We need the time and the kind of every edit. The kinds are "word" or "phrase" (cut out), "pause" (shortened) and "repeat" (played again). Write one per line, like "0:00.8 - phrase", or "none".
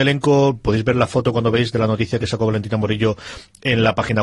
none